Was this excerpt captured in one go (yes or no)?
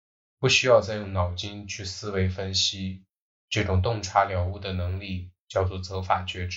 yes